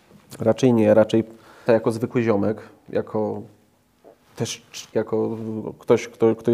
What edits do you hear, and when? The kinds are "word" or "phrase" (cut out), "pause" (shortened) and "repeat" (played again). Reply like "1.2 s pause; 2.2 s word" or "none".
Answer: 1.7 s word; 4.9 s word